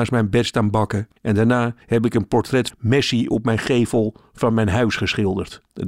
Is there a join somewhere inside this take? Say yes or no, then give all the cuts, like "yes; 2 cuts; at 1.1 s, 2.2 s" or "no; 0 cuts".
yes; 3 cuts; at 1.2 s, 1.8 s, 2.7 s